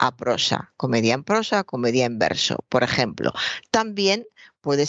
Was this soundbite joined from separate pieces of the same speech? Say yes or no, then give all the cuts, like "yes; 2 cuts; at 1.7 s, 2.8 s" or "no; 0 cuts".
no; 0 cuts